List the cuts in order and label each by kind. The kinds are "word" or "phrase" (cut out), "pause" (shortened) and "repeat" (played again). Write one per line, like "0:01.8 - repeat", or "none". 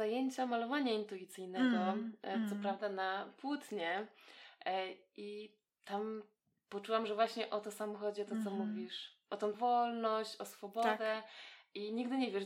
0:09.5 - word